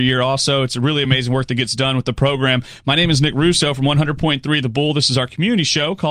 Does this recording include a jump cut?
no; 0 cuts

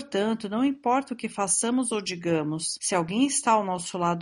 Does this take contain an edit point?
no; 0 cuts

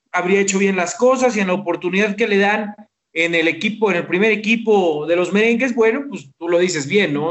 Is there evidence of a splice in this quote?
no; 0 cuts

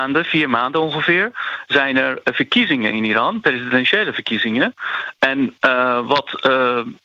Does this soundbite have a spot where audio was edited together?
no; 0 cuts

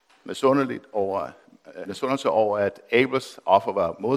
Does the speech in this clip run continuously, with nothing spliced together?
no; 1 cut; at 1.9 s

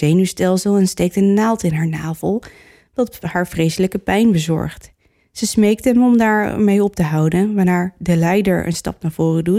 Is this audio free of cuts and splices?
yes; 0 cuts

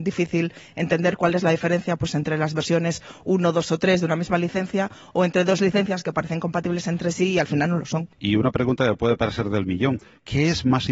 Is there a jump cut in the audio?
no; 0 cuts

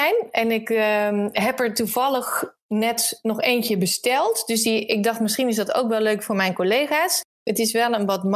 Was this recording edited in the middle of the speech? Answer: no; 0 cuts

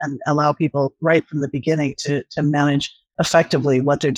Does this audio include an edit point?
no; 0 cuts

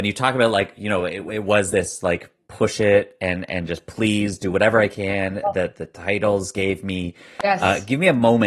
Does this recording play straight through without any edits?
yes; 0 cuts

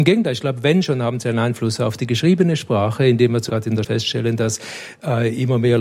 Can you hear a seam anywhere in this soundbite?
yes; 2 cuts; at 3.5 s, 3.8 s

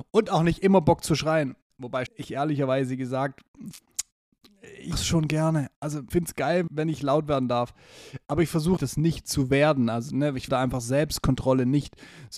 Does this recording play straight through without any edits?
no; 6 cuts; at 2.1 s, 4.9 s, 6.1 s, 6.7 s, 8.8 s, 10.5 s

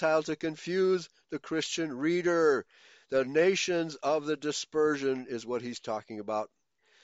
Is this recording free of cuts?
yes; 0 cuts

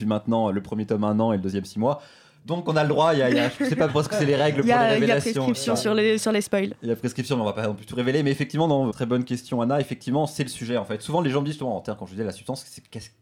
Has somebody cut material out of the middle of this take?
yes; 1 cut; at 8.9 s

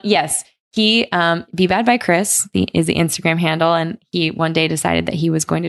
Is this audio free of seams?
yes; 0 cuts

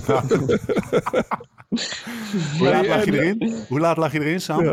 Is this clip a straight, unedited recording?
yes; 0 cuts

